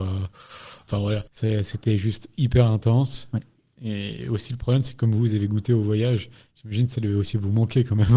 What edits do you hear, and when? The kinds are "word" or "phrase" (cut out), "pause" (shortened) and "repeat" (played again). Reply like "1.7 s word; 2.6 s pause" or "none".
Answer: 1.3 s pause; 3.6 s pause